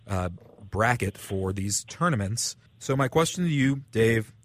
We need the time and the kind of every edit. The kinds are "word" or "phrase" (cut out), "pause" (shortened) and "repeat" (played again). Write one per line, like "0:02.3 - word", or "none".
0:02.7 - pause